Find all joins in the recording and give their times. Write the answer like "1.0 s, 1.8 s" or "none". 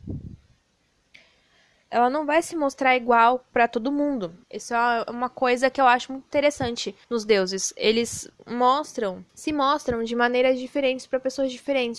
4.4 s, 7.0 s, 9.3 s

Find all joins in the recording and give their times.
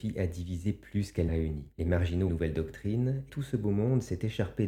1.3 s, 1.7 s, 2.3 s, 3.3 s

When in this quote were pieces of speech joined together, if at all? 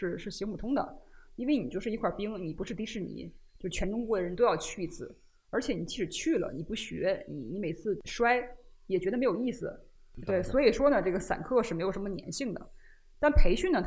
none

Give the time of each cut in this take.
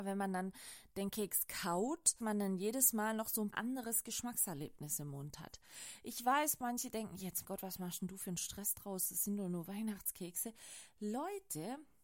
2.2 s, 3.5 s, 7.4 s

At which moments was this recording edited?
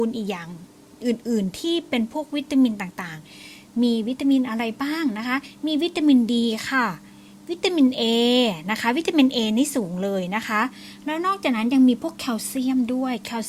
none

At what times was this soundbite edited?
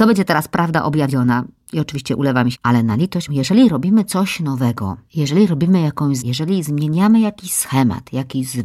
2.5 s, 3.3 s, 5.0 s, 6.2 s

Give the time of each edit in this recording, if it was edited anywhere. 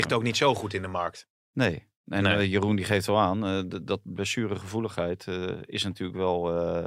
none

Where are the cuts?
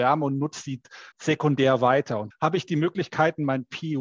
1.1 s, 2.3 s

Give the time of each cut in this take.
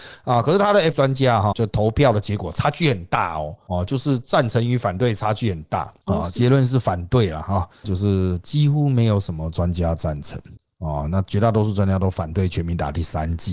0.9 s, 1.5 s, 7.8 s

